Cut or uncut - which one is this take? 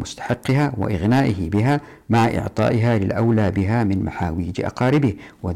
uncut